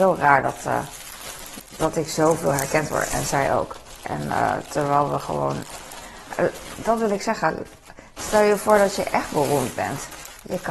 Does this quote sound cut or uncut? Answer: uncut